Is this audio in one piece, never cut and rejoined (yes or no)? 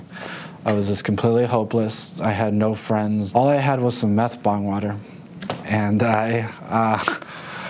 no